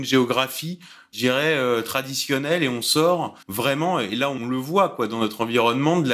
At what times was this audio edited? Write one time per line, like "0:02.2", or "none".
0:03.4

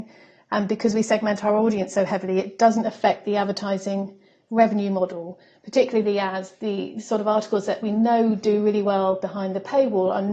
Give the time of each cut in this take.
none

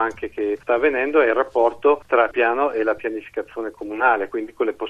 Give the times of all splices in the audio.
0:02.3

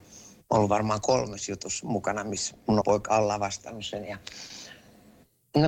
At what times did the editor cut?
0:02.8

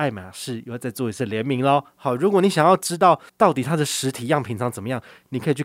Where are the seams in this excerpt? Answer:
0:03.3

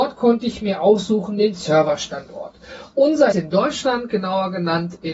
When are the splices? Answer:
0:03.3

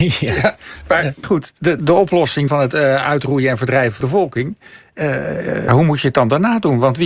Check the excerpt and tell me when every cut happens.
0:01.2
0:01.8
0:02.5
0:04.0
0:05.7

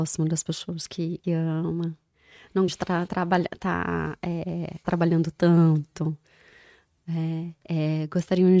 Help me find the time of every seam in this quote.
0:01.2
0:02.7
0:03.1
0:04.8

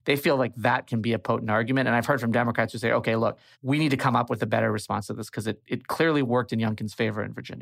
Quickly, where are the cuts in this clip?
0:03.5

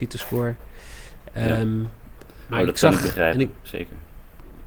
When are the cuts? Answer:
none

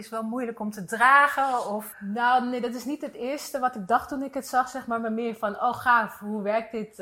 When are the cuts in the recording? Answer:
0:01.9

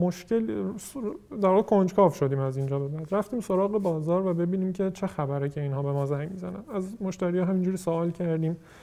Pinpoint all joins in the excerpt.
none

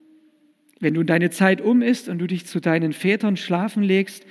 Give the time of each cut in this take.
none

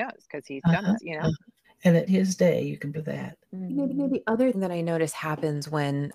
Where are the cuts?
0:01.0
0:01.6
0:02.1
0:02.9
0:03.4
0:03.9
0:04.5

